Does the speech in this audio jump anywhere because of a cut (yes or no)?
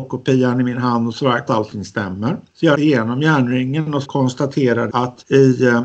yes